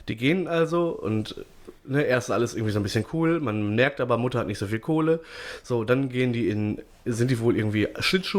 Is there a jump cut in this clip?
no; 0 cuts

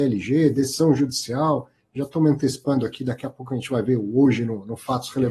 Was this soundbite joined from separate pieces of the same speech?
no; 0 cuts

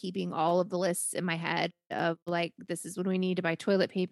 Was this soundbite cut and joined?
yes; 1 cut; at 2.2 s

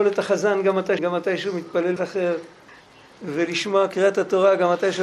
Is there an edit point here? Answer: yes; 3 cuts; at 1.0 s, 2.0 s, 2.7 s

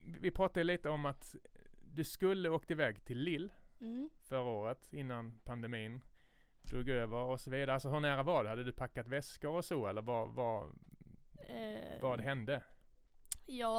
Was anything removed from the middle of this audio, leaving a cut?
no; 0 cuts

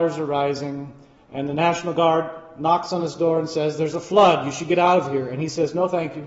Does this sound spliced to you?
no; 0 cuts

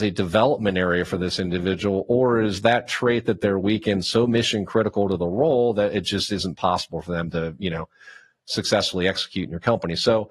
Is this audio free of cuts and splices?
yes; 0 cuts

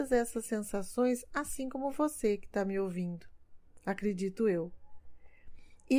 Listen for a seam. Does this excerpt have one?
no; 0 cuts

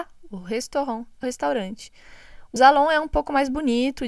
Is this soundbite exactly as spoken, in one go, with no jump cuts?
no; 2 cuts; at 1.2 s, 2.6 s

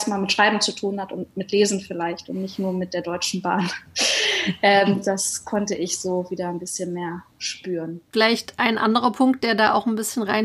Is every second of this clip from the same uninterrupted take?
yes; 0 cuts

